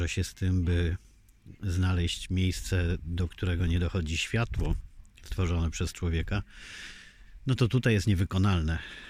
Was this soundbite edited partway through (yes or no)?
no